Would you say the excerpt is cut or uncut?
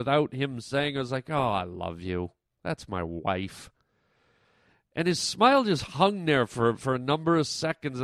uncut